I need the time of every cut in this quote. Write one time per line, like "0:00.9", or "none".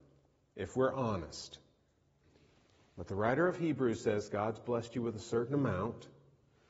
none